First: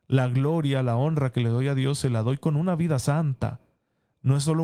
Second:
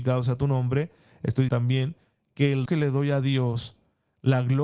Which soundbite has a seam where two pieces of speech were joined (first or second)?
second